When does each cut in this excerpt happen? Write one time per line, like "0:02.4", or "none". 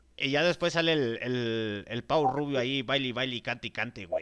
none

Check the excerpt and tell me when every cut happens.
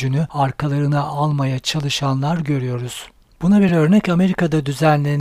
none

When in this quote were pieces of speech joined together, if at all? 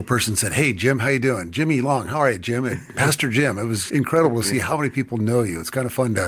0:03.9

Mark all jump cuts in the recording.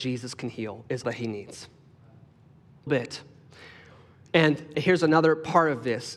0:01.0
0:02.9
0:04.7

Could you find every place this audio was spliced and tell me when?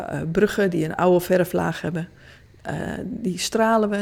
none

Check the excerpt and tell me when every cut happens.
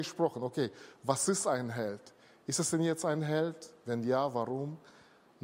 none

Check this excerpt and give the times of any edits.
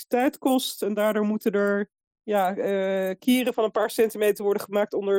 0:02.0

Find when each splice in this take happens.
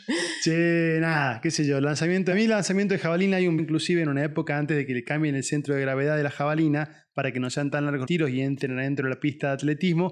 0:02.3
0:03.6
0:08.1

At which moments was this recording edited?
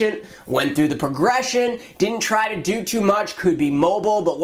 none

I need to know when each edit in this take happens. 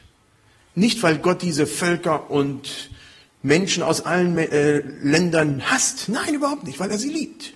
none

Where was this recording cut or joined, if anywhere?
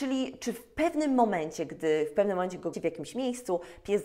0:02.7

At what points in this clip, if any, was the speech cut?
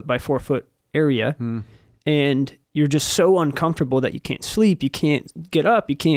0:02.6

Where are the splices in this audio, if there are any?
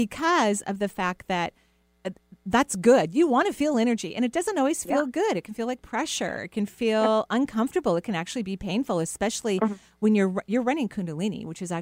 none

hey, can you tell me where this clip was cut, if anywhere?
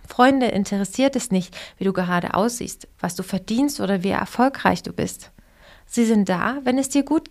none

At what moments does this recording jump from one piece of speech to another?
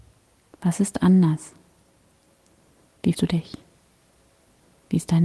0:03.1

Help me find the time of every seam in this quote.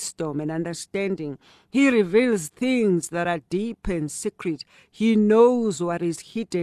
none

